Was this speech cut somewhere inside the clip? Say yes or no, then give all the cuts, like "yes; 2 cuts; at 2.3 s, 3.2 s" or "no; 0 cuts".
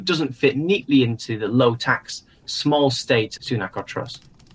yes; 1 cut; at 3.4 s